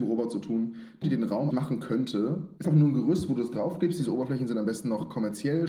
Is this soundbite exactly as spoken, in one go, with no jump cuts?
no; 3 cuts; at 1.0 s, 1.5 s, 2.6 s

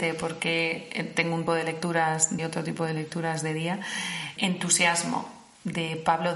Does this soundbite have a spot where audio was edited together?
yes; 3 cuts; at 1.5 s, 2.4 s, 4.4 s

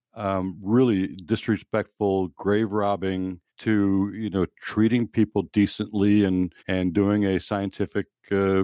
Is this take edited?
yes; 2 cuts; at 3.5 s, 6.6 s

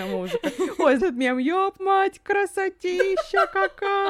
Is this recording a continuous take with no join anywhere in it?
no; 2 cuts; at 1.0 s, 1.8 s

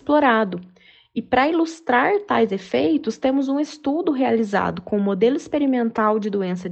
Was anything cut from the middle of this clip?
no; 0 cuts

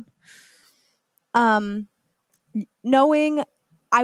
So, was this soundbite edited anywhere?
yes; 1 cut; at 2.7 s

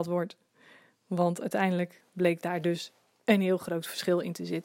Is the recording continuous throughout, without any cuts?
yes; 0 cuts

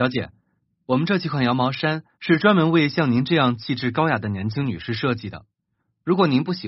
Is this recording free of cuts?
no; 1 cut; at 2.1 s

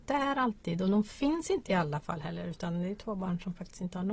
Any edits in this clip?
no; 0 cuts

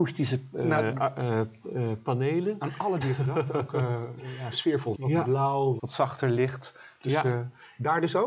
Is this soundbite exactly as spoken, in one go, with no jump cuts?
no; 3 cuts; at 3.0 s, 4.9 s, 5.8 s

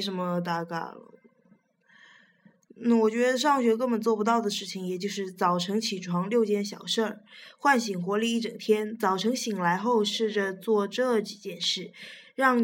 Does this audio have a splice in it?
no; 0 cuts

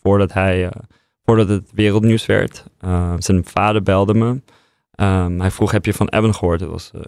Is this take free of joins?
yes; 0 cuts

